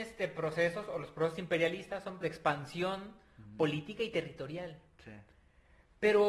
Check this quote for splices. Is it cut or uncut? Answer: cut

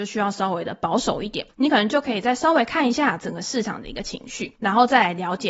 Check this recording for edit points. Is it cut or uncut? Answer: cut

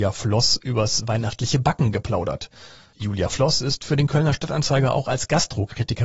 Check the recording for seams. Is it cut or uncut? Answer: uncut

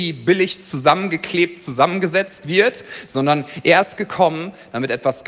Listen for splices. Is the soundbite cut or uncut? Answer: uncut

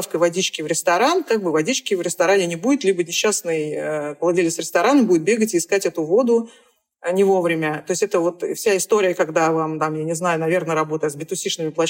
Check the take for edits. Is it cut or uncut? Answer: uncut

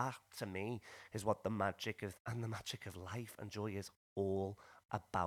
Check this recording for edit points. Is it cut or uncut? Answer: cut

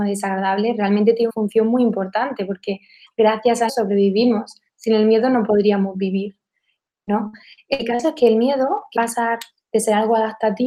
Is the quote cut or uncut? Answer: cut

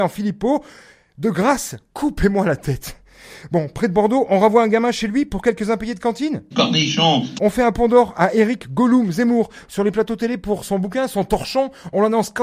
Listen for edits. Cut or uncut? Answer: uncut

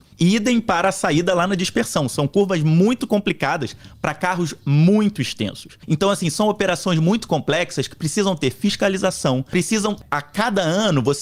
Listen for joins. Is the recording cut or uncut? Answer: uncut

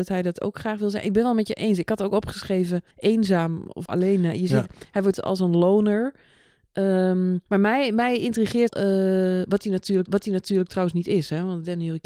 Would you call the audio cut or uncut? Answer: cut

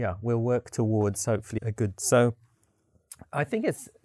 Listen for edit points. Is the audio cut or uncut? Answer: cut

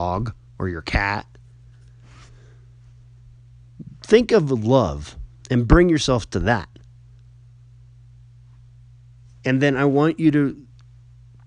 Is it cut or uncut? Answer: uncut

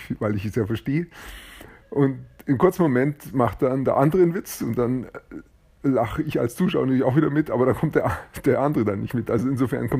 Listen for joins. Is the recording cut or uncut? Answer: uncut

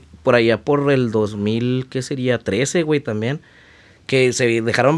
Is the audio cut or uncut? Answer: uncut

